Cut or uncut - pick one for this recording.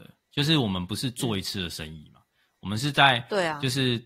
uncut